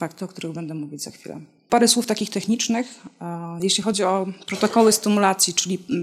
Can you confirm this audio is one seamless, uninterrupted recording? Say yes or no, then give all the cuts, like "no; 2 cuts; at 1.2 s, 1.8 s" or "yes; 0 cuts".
yes; 0 cuts